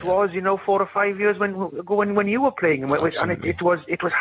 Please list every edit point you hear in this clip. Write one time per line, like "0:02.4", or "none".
none